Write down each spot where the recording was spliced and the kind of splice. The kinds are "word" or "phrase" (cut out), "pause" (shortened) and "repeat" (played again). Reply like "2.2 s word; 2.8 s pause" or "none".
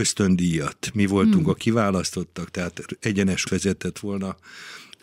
3.4 s word